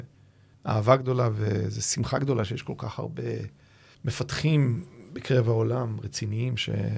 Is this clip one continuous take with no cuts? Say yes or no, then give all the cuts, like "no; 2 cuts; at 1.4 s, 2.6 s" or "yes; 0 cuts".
yes; 0 cuts